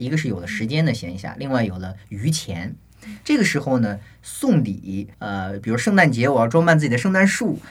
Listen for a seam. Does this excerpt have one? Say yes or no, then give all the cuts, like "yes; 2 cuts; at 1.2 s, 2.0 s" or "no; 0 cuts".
yes; 1 cut; at 5.1 s